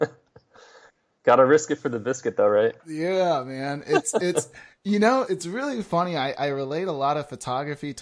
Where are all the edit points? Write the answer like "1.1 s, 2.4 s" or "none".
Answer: 2.8 s, 5.2 s